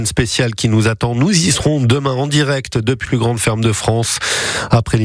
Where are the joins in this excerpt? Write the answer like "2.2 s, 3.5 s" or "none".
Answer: 3.1 s